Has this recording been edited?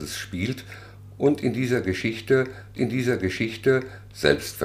yes; 1 cut; at 2.8 s

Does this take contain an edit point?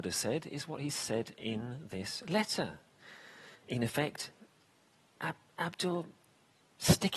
yes; 1 cut; at 3.5 s

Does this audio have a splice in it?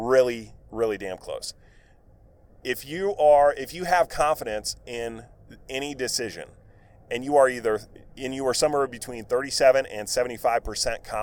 no; 0 cuts

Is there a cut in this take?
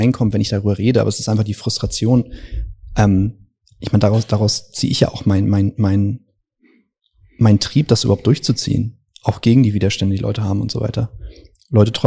no; 0 cuts

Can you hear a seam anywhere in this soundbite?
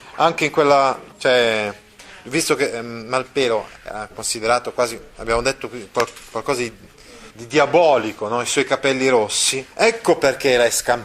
yes; 4 cuts; at 1.1 s, 3.8 s, 7.3 s, 9.7 s

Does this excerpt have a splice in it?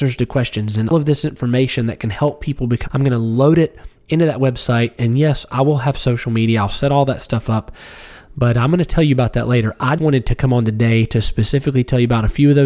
yes; 3 cuts; at 0.9 s, 2.9 s, 10.0 s

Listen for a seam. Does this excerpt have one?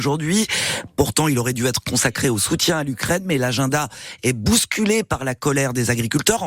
no; 0 cuts

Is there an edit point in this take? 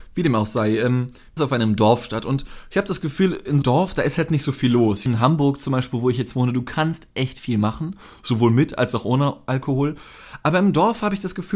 yes; 3 cuts; at 1.4 s, 3.6 s, 5.1 s

